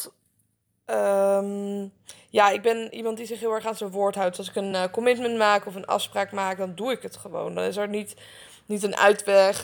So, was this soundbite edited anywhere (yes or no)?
no